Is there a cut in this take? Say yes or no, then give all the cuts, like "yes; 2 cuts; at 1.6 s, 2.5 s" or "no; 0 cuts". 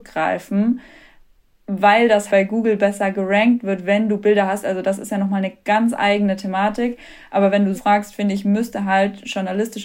yes; 2 cuts; at 2.3 s, 7.7 s